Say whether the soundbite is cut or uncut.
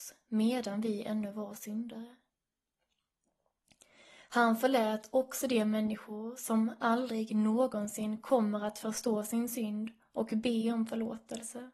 uncut